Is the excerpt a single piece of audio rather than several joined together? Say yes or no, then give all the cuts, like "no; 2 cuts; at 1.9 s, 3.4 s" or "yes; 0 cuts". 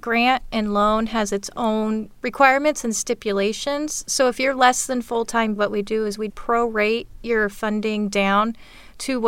no; 3 cuts; at 2.1 s, 5.6 s, 6.3 s